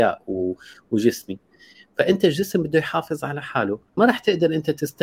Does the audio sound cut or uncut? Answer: cut